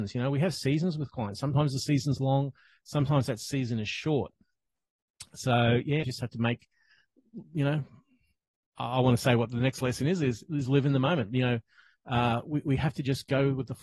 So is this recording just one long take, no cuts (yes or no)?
no